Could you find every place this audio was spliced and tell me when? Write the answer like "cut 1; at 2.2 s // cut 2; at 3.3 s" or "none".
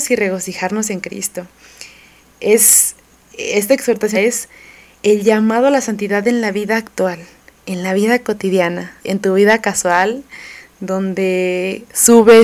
cut 1; at 4.1 s // cut 2; at 9.0 s